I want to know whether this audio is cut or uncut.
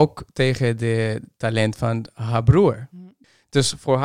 uncut